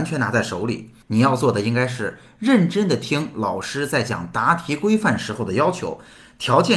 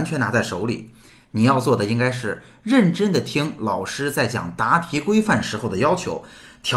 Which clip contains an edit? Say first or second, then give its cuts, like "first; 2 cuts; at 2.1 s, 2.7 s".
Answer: first; 1 cut; at 1.0 s